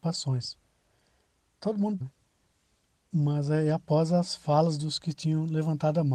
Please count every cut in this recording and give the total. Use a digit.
1